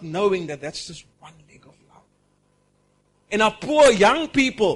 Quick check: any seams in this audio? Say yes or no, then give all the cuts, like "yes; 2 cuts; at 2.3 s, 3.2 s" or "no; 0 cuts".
no; 0 cuts